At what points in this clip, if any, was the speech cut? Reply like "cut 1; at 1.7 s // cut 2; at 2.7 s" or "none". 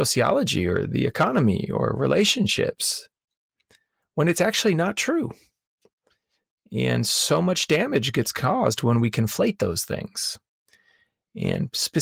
none